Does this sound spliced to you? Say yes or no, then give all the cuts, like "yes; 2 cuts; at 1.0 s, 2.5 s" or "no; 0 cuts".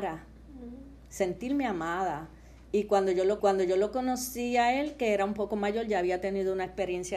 yes; 1 cut; at 3.4 s